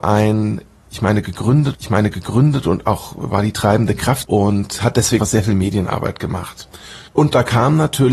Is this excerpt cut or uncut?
cut